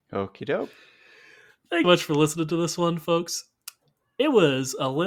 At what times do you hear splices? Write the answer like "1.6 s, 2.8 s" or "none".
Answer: 1.8 s